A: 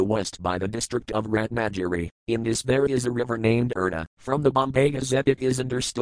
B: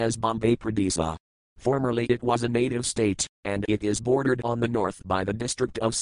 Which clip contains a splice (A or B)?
A